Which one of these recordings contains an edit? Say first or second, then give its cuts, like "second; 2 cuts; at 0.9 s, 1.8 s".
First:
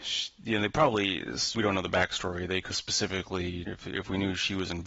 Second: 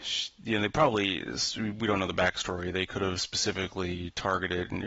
first; 3 cuts; at 1.5 s, 2.7 s, 3.7 s